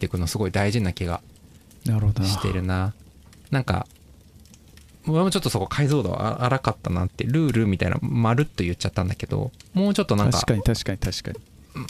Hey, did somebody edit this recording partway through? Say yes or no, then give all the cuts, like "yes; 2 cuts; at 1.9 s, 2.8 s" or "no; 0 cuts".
no; 0 cuts